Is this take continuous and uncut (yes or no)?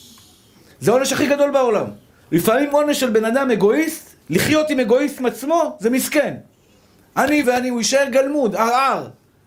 no